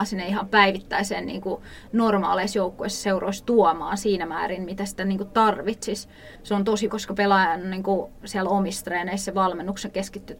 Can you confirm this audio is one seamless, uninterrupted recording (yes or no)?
no